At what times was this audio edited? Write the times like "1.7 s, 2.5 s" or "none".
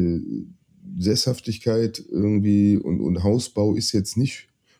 none